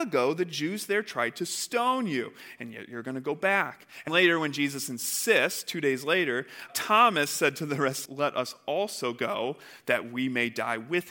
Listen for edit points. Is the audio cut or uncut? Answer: cut